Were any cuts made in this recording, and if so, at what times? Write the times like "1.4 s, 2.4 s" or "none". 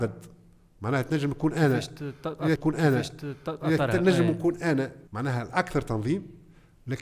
2.6 s, 5.1 s